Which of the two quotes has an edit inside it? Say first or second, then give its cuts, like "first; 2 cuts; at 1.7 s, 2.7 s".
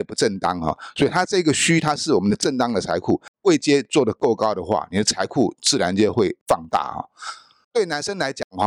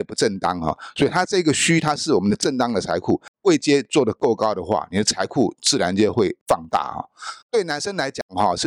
second; 1 cut; at 7.4 s